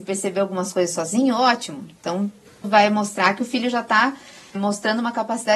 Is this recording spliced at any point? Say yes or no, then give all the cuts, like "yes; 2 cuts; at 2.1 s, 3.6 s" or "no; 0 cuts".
yes; 2 cuts; at 2.6 s, 4.5 s